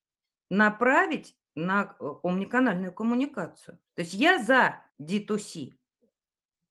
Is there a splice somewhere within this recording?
yes; 2 cuts; at 3.9 s, 4.9 s

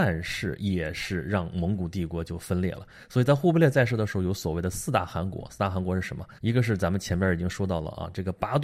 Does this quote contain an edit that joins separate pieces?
yes; 1 cut; at 6.4 s

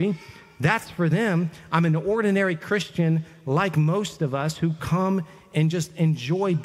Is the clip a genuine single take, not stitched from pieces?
yes; 0 cuts

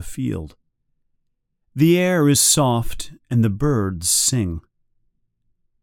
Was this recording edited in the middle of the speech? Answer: no; 0 cuts

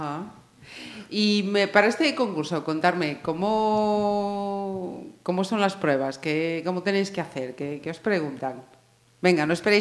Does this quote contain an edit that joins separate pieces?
no; 0 cuts

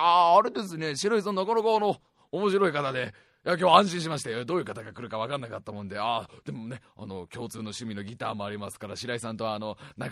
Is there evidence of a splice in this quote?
no; 0 cuts

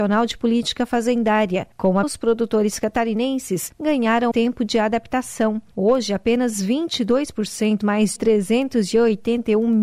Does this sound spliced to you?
yes; 4 cuts; at 2.0 s, 4.3 s, 7.8 s, 8.2 s

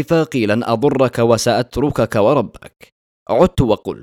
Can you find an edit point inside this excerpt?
no; 0 cuts

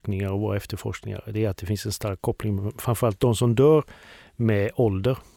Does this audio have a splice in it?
no; 0 cuts

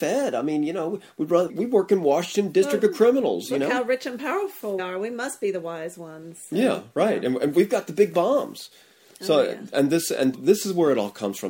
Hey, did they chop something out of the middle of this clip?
yes; 3 cuts; at 1.5 s, 4.8 s, 10.3 s

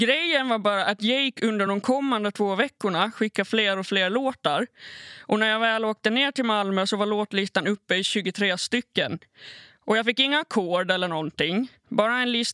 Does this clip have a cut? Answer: no; 0 cuts

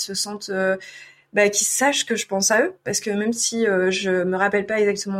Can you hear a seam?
no; 0 cuts

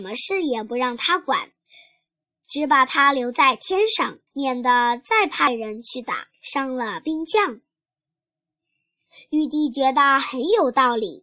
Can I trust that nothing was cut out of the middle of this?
no; 2 cuts; at 4.3 s, 6.3 s

